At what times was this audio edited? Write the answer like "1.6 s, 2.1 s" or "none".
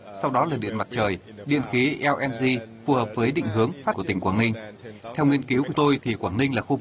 3.9 s, 5.7 s